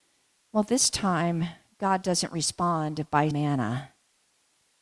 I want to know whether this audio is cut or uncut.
cut